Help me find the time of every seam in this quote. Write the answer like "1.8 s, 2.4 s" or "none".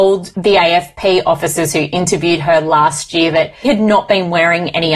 3.6 s